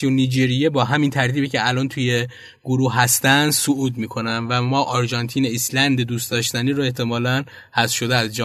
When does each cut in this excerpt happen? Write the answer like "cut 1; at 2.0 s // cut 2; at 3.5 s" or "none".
none